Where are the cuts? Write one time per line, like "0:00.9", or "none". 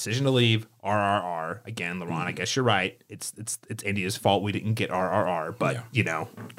none